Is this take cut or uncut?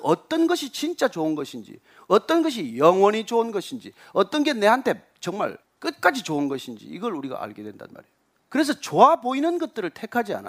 cut